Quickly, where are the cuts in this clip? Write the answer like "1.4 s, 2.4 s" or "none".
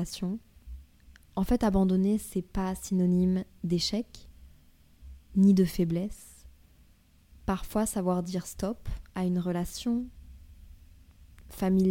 none